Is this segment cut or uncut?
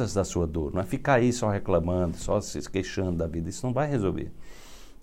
uncut